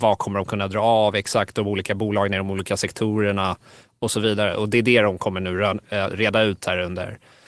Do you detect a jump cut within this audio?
no; 0 cuts

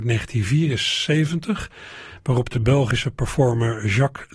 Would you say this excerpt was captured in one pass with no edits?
yes; 0 cuts

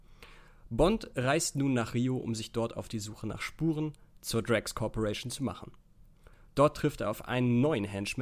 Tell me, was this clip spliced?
no; 0 cuts

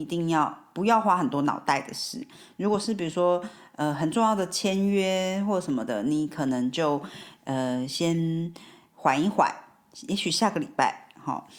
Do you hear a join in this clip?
no; 0 cuts

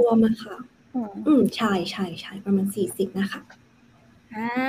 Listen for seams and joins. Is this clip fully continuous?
yes; 0 cuts

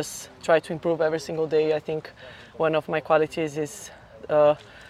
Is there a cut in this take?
no; 0 cuts

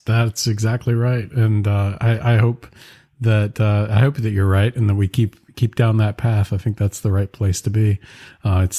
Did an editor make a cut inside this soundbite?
no; 0 cuts

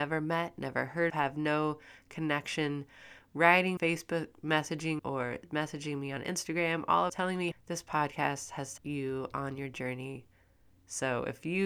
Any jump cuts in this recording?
yes; 6 cuts; at 1.1 s, 3.8 s, 5.0 s, 7.1 s, 7.5 s, 8.8 s

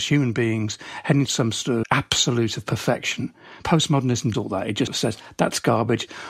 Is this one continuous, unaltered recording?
no; 4 cuts; at 1.3 s, 1.8 s, 4.3 s, 4.9 s

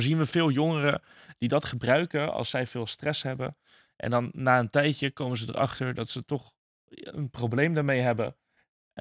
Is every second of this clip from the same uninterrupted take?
yes; 0 cuts

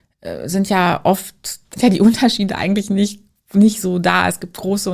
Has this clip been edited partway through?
yes; 1 cut; at 1.8 s

